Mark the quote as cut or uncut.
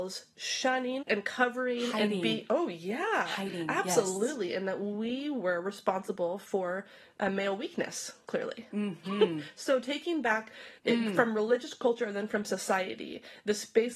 cut